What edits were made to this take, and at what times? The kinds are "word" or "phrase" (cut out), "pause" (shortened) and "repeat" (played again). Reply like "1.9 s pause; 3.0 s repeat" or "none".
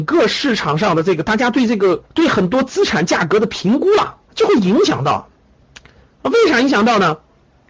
2.1 s pause; 4.2 s pause; 5.6 s pause